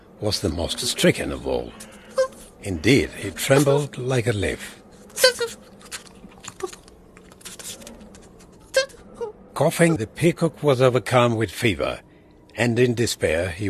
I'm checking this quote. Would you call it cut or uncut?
cut